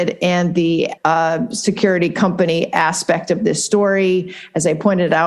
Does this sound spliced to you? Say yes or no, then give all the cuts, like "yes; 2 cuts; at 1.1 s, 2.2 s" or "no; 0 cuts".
yes; 1 cut; at 1.0 s